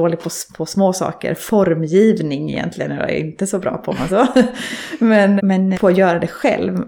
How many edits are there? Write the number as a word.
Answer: four